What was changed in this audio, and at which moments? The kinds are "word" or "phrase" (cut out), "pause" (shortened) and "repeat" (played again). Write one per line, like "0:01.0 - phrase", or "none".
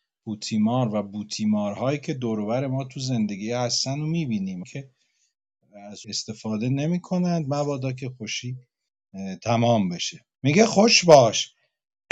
0:04.6 - word
0:06.0 - word
0:10.3 - pause